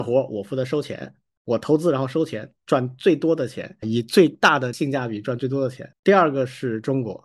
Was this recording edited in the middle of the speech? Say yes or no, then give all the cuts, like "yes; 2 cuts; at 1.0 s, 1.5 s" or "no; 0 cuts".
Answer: yes; 2 cuts; at 3.8 s, 5.9 s